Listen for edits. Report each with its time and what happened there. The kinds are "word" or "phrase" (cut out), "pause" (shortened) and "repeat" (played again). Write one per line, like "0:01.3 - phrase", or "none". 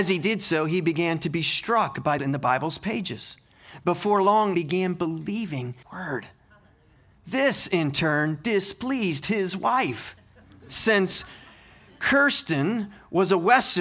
0:02.2 - phrase
0:04.5 - phrase
0:05.8 - word